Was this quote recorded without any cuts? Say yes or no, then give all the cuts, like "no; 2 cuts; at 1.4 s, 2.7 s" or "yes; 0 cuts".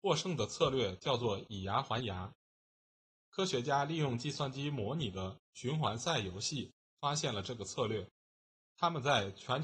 yes; 0 cuts